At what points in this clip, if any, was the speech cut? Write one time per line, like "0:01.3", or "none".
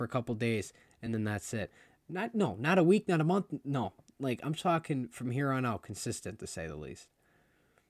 none

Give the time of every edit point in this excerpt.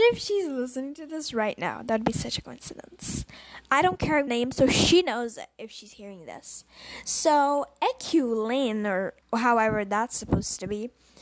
0:04.3
0:09.2

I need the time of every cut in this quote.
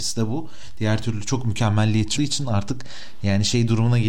0:02.2

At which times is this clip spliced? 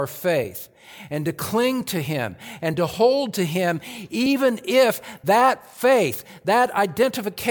none

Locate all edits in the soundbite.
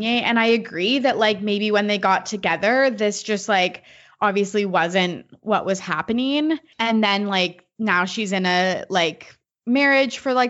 none

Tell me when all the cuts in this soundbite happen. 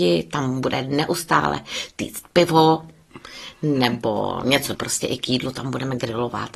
0:04.7

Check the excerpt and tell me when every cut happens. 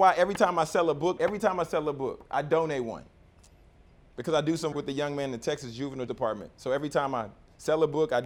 0:01.2
0:04.7
0:06.1

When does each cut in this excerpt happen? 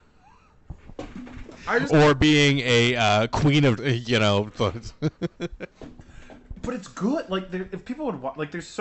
0:01.9
0:03.8

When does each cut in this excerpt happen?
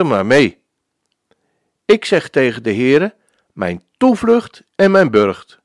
0:04.7

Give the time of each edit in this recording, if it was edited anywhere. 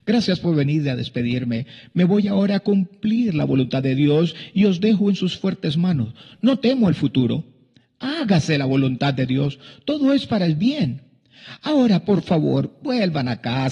none

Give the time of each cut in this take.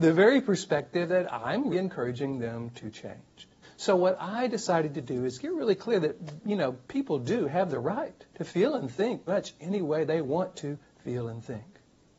0:01.7
0:03.6
0:08.3
0:09.3

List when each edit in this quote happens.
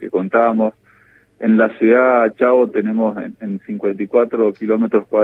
none

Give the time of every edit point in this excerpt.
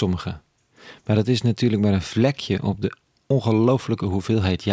none

